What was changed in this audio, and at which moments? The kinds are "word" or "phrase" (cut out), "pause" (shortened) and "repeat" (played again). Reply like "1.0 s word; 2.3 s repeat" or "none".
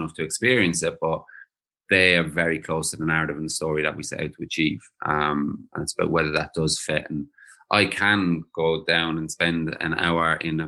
none